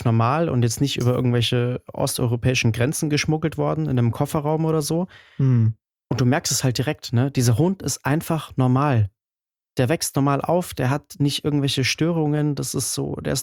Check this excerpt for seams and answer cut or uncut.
uncut